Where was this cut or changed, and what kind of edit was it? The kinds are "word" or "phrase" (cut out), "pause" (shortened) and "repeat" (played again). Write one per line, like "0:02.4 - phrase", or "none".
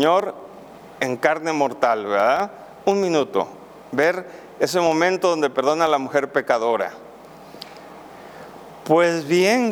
none

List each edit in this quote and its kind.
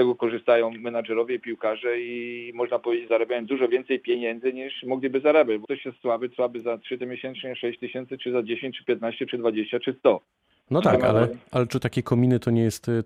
0:03.1 - word
0:05.6 - word
0:06.3 - word
0:07.0 - word

